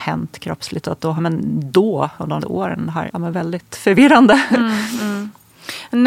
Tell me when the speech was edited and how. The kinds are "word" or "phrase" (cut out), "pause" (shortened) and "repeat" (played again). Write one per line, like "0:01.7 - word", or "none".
0:01.2 - word
0:02.4 - word
0:03.1 - word